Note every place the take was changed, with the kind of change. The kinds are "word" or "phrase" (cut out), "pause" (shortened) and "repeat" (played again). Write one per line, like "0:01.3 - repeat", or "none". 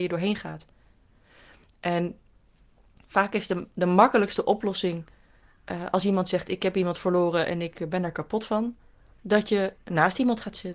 none